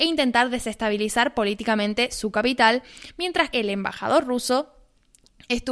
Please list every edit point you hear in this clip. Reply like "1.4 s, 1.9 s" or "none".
3.5 s